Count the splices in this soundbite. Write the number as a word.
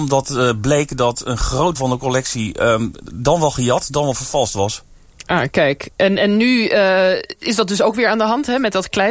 one